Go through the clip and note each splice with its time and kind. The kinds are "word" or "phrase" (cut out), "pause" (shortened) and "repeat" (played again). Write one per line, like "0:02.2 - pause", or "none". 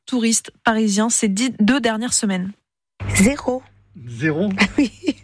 none